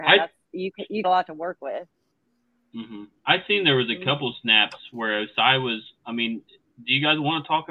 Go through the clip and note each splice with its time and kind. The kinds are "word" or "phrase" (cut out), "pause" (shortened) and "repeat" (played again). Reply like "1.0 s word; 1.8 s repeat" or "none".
1.0 s word; 3.2 s pause